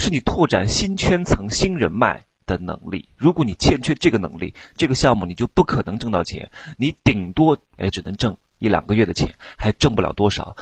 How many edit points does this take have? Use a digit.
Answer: 1